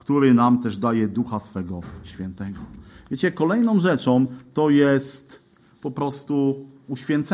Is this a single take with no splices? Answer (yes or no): yes